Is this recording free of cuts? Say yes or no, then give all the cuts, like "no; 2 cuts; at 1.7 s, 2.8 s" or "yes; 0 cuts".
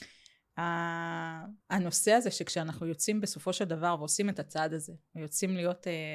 no; 1 cut; at 1.6 s